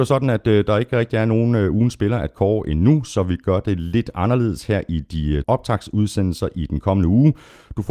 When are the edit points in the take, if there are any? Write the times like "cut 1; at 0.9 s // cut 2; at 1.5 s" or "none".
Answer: cut 1; at 5.4 s